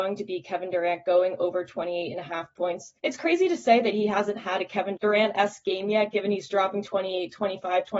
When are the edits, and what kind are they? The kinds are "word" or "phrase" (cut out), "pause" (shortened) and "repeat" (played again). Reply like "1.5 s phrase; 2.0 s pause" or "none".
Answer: 3.0 s pause; 5.0 s word